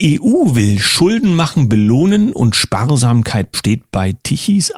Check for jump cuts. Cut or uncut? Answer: cut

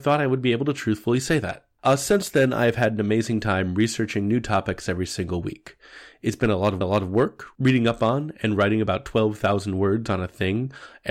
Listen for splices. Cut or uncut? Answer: cut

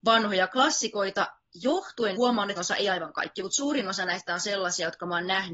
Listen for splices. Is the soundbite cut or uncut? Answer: cut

